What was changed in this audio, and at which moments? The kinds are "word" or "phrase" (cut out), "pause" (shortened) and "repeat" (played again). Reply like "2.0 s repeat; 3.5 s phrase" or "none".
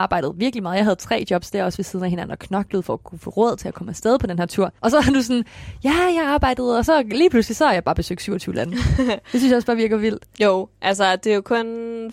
4.8 s pause